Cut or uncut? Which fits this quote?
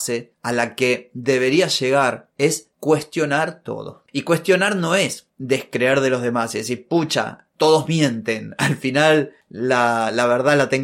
uncut